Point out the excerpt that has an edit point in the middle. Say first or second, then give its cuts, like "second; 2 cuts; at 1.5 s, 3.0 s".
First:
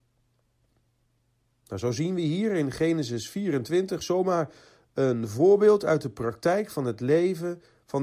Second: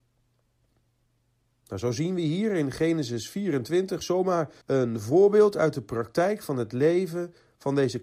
second; 1 cut; at 4.6 s